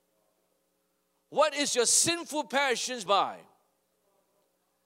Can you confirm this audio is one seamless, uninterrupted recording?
no; 1 cut; at 3.1 s

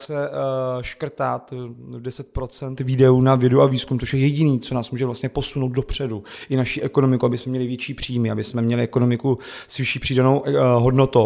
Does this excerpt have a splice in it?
no; 0 cuts

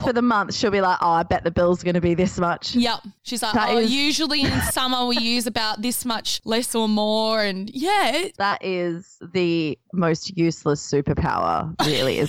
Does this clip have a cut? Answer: no; 0 cuts

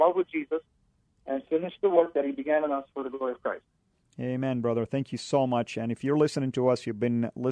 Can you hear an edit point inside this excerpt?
no; 0 cuts

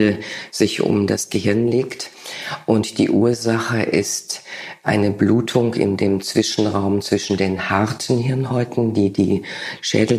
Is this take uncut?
yes; 0 cuts

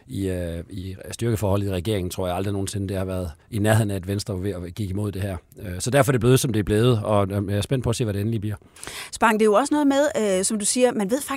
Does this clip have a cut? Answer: yes; 1 cut; at 3.4 s

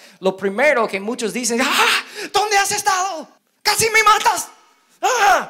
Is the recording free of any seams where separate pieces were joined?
no; 1 cut; at 3.4 s

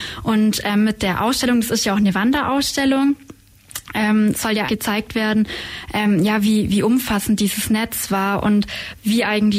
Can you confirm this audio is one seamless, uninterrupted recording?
no; 1 cut; at 4.7 s

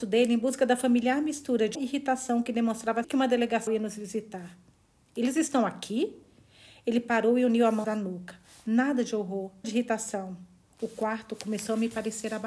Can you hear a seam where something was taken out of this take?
yes; 5 cuts; at 1.7 s, 3.0 s, 3.7 s, 7.8 s, 9.6 s

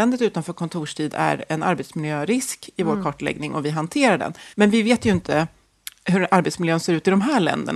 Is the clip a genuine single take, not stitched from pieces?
no; 1 cut; at 4.5 s

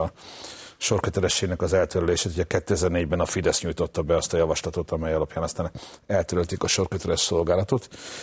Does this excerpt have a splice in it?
no; 0 cuts

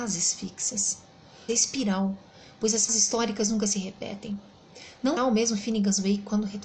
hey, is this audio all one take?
no; 3 cuts; at 1.5 s, 2.9 s, 5.2 s

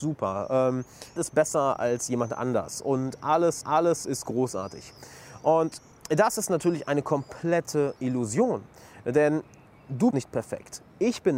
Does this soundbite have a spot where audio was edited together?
yes; 5 cuts; at 1.2 s, 3.6 s, 5.9 s, 8.0 s, 10.1 s

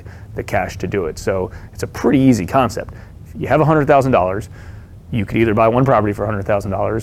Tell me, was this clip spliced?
no; 0 cuts

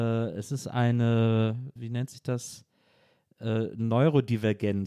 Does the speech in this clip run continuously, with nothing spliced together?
no; 1 cut; at 1.8 s

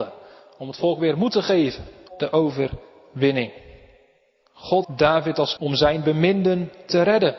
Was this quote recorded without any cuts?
no; 3 cuts; at 2.1 s, 4.8 s, 5.6 s

